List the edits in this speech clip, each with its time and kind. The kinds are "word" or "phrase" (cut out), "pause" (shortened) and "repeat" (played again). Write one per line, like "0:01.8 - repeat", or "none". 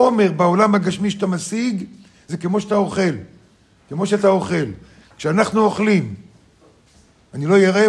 none